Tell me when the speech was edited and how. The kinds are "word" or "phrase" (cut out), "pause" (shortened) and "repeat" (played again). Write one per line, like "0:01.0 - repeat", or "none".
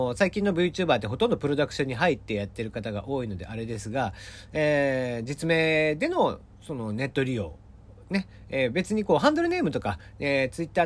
none

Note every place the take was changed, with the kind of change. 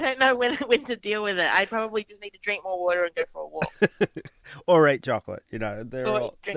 none

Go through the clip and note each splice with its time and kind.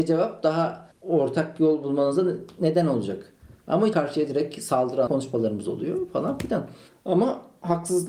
0:00.9 - pause
0:03.9 - phrase
0:05.1 - word

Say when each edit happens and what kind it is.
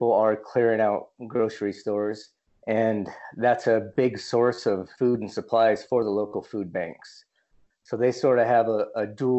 0:04.9 - pause

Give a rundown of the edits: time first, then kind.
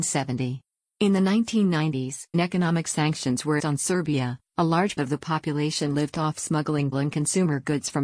0:02.3 - word
0:03.6 - word
0:05.0 - word
0:06.9 - word

